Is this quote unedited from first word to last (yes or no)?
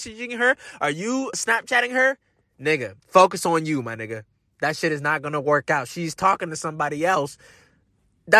no